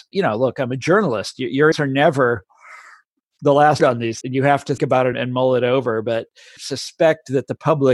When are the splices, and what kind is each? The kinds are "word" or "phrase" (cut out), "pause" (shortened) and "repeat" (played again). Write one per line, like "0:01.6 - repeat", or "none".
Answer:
0:01.7 - word
0:03.8 - word
0:04.2 - word
0:04.8 - word
0:05.1 - word
0:06.6 - word